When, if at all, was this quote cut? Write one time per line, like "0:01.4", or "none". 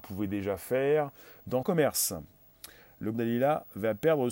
0:01.6
0:03.1